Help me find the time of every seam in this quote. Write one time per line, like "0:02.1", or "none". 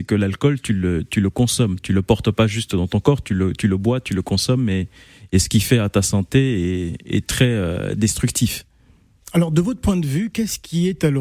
none